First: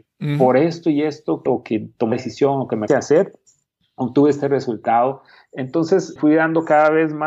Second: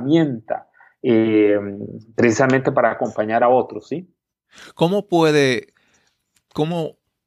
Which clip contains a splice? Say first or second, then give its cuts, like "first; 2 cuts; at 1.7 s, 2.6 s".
first; 4 cuts; at 1.5 s, 2.1 s, 2.9 s, 6.2 s